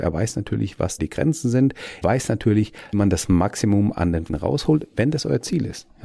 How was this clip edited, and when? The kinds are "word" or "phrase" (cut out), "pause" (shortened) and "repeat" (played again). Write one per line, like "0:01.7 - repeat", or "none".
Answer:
0:01.0 - word
0:02.0 - word
0:02.9 - word
0:04.3 - word